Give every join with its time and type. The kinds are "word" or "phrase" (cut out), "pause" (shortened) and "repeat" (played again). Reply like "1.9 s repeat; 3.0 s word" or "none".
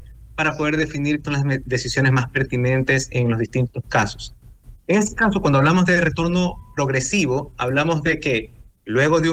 1.2 s word